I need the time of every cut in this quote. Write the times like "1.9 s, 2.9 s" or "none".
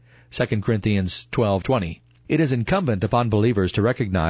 1.6 s